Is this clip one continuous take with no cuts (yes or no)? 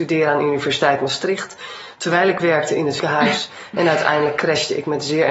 no